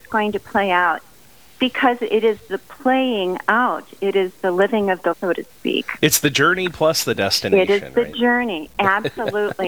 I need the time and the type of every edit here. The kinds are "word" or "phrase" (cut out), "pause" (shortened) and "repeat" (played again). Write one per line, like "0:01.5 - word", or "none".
0:05.1 - word